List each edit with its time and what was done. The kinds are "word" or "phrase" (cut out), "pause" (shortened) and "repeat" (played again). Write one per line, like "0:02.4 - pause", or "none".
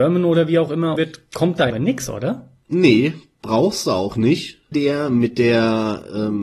0:01.0 - word
0:01.7 - phrase
0:04.7 - word